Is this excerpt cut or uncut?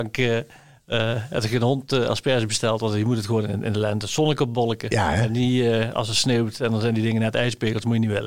uncut